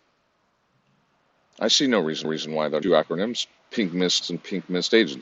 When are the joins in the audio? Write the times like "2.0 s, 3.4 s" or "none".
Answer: 2.2 s, 2.8 s, 3.6 s, 4.2 s